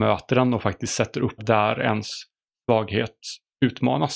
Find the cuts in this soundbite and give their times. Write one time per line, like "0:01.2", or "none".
0:01.4